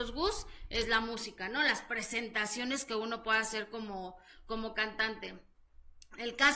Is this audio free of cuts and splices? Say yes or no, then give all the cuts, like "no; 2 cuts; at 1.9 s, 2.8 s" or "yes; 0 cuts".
yes; 0 cuts